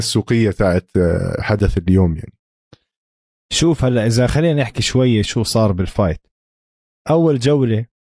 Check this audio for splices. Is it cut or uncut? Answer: cut